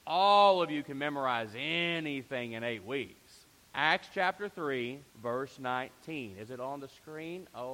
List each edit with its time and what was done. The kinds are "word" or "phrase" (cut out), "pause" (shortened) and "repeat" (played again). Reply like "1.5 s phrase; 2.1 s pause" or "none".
3.6 s pause; 5.1 s pause